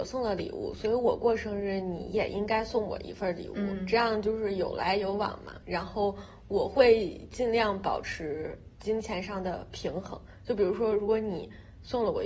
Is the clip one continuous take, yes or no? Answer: no